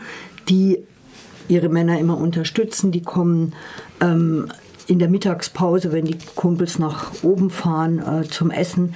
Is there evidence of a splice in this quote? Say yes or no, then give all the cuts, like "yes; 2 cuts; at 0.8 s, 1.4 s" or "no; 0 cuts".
no; 0 cuts